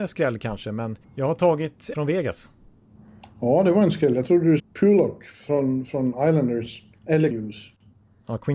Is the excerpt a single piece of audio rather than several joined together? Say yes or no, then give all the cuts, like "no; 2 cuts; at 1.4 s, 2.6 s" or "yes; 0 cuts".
no; 4 cuts; at 1.0 s, 1.9 s, 4.6 s, 7.3 s